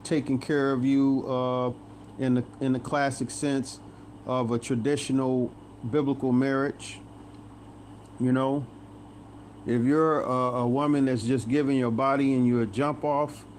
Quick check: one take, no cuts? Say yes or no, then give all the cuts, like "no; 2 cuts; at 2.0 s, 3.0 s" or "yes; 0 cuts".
yes; 0 cuts